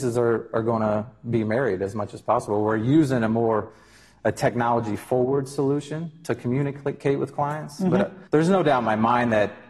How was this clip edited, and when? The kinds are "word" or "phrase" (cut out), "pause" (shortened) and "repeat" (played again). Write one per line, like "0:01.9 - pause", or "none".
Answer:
0:08.3 - pause